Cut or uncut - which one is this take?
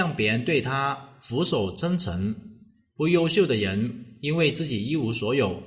uncut